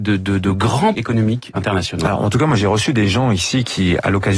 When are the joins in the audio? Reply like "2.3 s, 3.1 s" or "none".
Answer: 0.9 s, 1.5 s